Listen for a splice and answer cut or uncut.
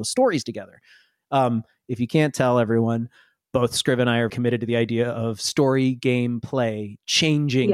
cut